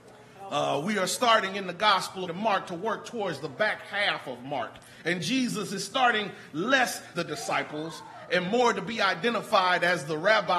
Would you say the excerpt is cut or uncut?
cut